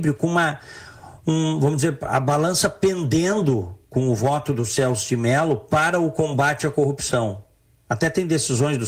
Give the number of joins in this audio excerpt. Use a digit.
0